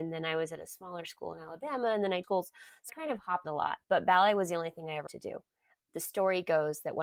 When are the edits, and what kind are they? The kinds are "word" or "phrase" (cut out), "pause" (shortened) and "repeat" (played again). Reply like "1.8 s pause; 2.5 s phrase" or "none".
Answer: 2.2 s word; 2.9 s word; 3.4 s word; 3.8 s pause; 5.1 s word